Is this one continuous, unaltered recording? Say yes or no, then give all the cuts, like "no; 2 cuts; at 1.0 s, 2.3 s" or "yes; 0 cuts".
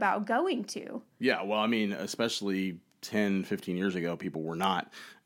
yes; 0 cuts